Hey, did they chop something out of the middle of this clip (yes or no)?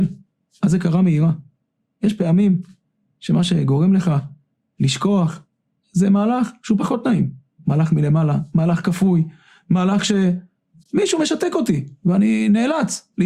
no